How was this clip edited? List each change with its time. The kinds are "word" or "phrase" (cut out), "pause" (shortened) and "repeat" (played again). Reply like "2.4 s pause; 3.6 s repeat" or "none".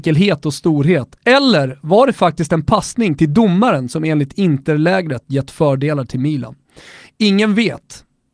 none